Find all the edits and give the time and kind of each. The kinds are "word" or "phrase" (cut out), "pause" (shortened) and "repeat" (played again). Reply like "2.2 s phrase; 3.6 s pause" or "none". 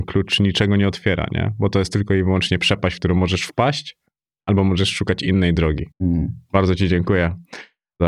5.9 s pause